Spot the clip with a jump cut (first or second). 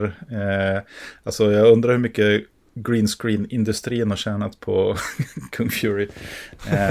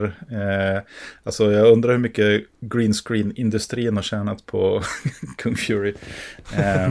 second